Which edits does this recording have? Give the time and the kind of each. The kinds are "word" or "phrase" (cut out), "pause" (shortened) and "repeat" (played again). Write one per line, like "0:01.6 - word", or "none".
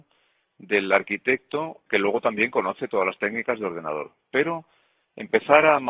0:01.9 - word